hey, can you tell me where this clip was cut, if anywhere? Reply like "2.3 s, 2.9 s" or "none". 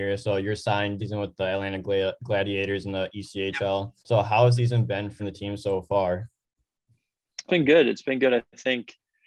1.0 s, 4.0 s, 4.6 s, 5.2 s, 7.5 s